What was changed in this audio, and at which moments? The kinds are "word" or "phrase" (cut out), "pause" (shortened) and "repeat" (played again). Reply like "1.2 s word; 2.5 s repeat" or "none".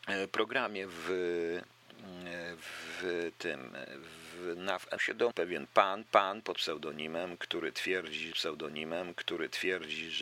5.0 s phrase; 5.3 s word; 6.1 s repeat; 8.3 s repeat